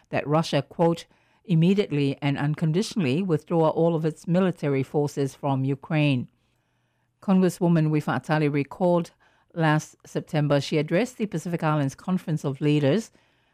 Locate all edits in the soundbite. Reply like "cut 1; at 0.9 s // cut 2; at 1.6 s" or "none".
none